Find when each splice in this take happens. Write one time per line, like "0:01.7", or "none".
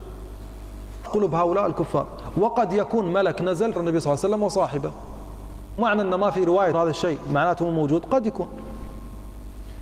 0:01.0
0:03.7
0:05.8
0:06.7